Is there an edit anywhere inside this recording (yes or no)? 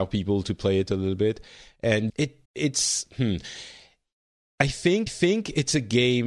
yes